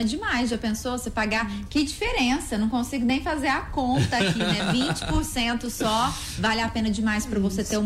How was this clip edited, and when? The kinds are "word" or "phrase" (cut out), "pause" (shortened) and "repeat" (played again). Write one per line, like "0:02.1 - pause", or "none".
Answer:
none

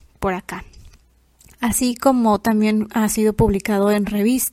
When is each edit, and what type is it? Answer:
none

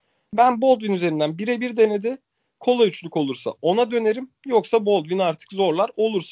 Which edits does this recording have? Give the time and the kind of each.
none

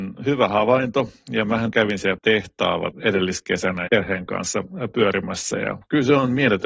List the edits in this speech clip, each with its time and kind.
0:01.7 - word
0:02.2 - word
0:02.9 - word
0:03.9 - word

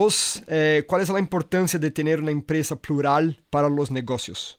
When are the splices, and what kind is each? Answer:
0:03.4 - pause

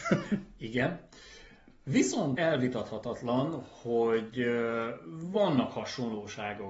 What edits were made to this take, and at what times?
0:02.4 - word

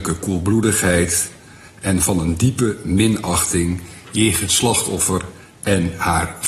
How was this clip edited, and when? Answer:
0:04.5 - word

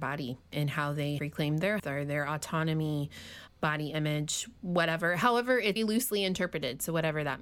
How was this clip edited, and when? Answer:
0:01.2 - word
0:01.8 - word
0:03.5 - word
0:05.8 - word

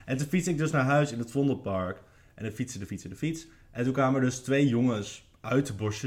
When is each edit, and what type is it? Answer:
none

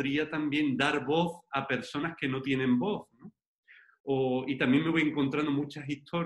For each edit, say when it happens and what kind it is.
none

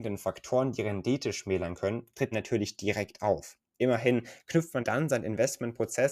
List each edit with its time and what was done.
0:02.3 - word
0:04.8 - word

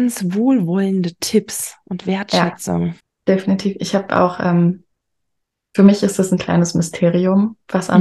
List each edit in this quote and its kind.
0:03.0 - pause

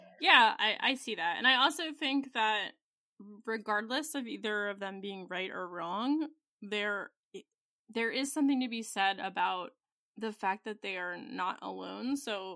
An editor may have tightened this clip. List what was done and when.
none

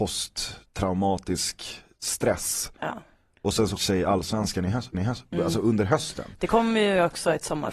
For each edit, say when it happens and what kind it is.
0:03.8 - word
0:04.9 - repeat

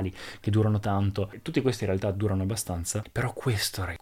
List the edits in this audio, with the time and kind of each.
none

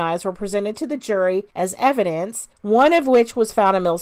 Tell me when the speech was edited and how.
0:01.5 - pause
0:02.5 - pause

